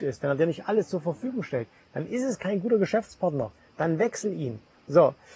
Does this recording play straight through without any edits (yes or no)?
yes